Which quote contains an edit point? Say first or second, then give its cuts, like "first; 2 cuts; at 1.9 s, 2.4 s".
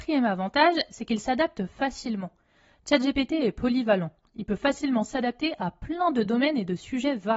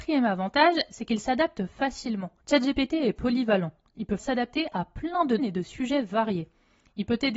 second; 3 cuts; at 2.4 s, 4.2 s, 5.4 s